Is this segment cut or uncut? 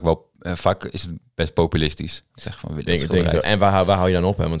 cut